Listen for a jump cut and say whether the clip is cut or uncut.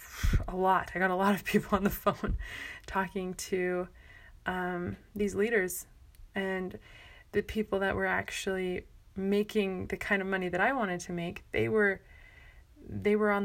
uncut